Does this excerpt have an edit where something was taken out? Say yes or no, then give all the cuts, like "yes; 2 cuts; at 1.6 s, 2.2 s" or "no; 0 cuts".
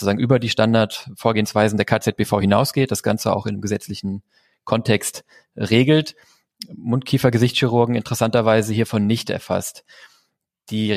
no; 0 cuts